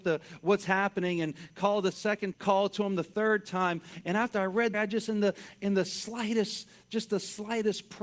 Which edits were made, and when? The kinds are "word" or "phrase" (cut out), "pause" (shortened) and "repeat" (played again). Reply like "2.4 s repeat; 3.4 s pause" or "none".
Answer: 1.9 s word; 2.3 s phrase; 4.7 s phrase